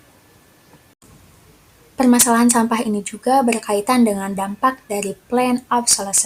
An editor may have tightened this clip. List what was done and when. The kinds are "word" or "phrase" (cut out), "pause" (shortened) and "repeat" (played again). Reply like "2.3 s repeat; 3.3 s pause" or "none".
none